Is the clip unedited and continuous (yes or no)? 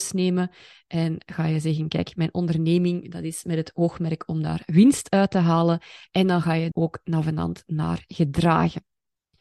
no